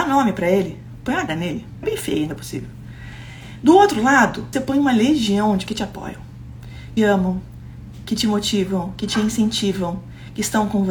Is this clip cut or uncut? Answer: cut